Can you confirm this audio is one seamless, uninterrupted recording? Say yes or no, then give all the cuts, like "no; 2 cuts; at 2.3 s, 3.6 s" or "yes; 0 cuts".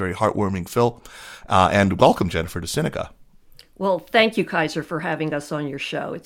yes; 0 cuts